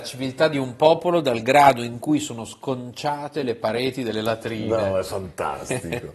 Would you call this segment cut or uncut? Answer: uncut